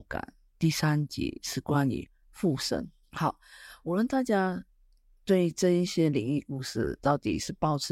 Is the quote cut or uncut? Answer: cut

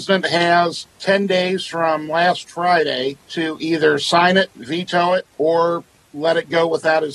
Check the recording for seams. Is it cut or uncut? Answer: cut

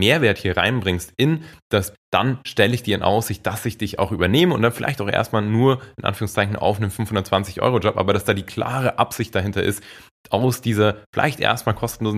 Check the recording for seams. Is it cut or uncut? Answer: cut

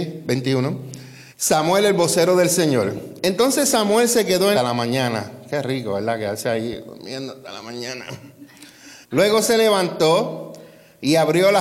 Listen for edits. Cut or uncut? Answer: cut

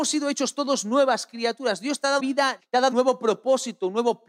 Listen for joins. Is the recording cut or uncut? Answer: cut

